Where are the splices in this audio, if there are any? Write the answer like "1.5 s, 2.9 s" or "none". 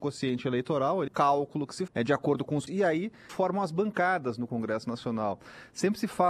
1.1 s, 1.9 s, 2.7 s, 3.3 s